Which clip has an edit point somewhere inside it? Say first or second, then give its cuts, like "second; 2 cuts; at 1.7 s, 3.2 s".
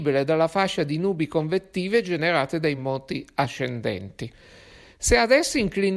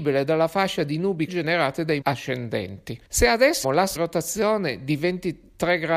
second; 5 cuts; at 1.3 s, 2.0 s, 3.0 s, 3.6 s, 4.0 s